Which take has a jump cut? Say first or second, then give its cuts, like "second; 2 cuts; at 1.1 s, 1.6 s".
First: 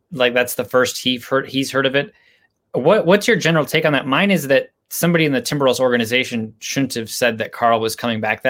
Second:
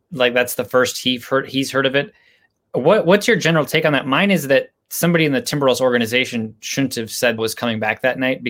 second; 1 cut; at 7.4 s